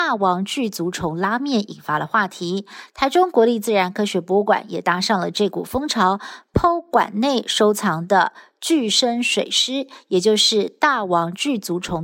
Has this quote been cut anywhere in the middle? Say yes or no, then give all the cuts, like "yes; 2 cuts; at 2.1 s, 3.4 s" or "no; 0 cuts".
no; 0 cuts